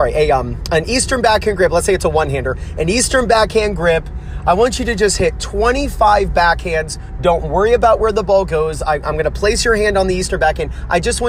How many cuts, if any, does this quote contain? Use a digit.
0